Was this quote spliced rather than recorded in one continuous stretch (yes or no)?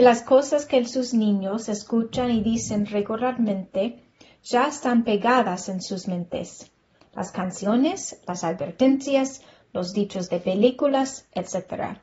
no